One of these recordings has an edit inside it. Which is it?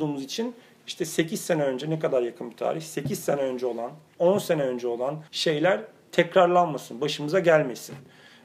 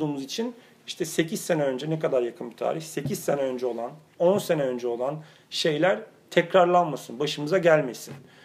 first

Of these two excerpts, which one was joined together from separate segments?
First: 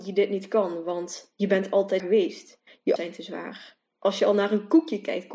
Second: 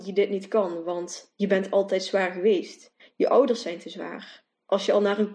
first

